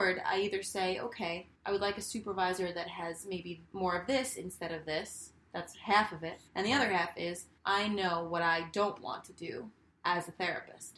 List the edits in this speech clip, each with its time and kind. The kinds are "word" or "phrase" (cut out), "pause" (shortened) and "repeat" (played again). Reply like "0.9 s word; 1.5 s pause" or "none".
1.5 s pause; 3.6 s pause; 6.5 s pause; 7.6 s pause; 9.9 s pause